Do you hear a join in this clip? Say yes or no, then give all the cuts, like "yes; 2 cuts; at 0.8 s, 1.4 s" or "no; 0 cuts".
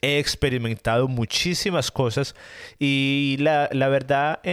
no; 0 cuts